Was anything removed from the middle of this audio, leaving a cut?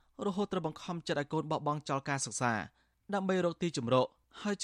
no; 0 cuts

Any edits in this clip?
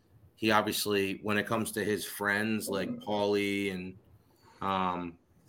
no; 0 cuts

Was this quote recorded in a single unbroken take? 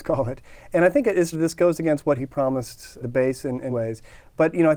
no; 4 cuts; at 1.3 s, 2.2 s, 3.0 s, 3.7 s

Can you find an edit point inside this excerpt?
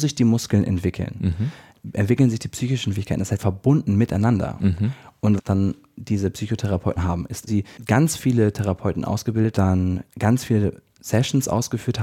yes; 5 cuts; at 3.4 s, 5.4 s, 7.0 s, 7.5 s, 9.5 s

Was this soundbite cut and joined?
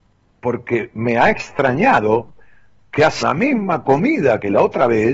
yes; 1 cut; at 3.2 s

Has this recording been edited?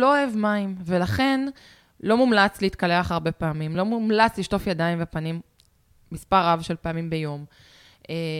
no; 0 cuts

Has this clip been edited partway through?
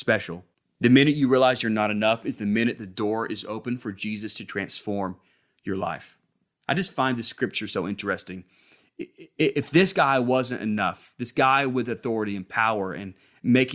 yes; 1 cut; at 6.5 s

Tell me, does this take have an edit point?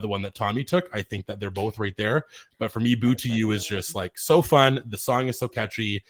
no; 0 cuts

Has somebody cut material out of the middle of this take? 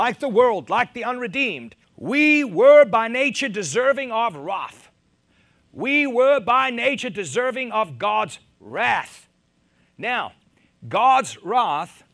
yes; 1 cut; at 1.8 s

